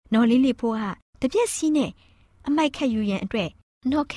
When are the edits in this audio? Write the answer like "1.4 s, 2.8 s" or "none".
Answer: none

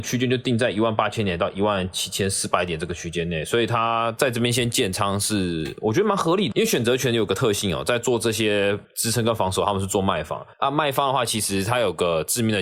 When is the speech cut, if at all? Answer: 6.5 s, 8.8 s, 10.5 s

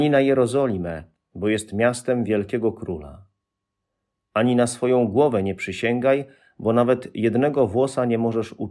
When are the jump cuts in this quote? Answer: none

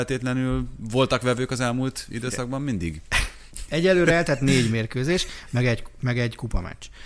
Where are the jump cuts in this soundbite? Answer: none

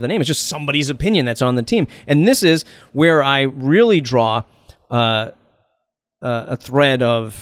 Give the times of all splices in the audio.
none

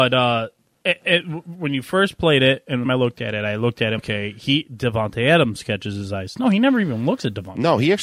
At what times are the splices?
2.8 s, 4.0 s

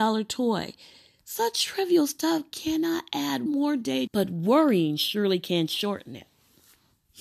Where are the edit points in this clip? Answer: 3.5 s, 4.1 s

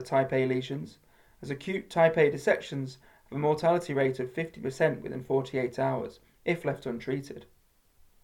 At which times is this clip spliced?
none

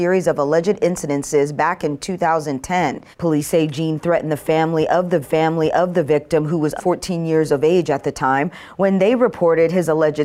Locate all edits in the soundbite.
3.1 s, 5.2 s, 6.8 s

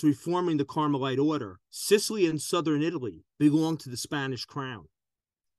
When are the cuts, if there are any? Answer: 1.6 s, 3.3 s

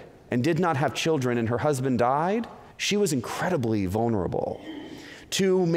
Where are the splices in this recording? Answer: 2.7 s

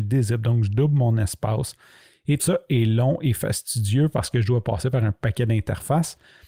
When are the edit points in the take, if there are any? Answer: 2.4 s

